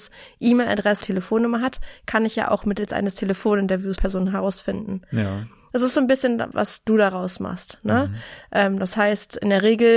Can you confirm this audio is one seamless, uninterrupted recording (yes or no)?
no